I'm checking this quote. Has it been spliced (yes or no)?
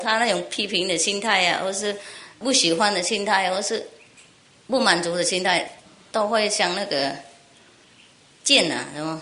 no